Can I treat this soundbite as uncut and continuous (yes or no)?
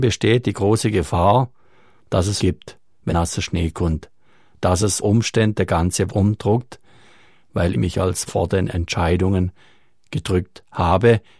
no